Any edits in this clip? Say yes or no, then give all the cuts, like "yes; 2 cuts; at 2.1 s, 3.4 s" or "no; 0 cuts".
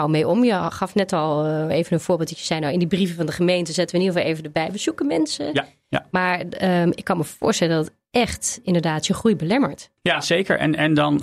no; 0 cuts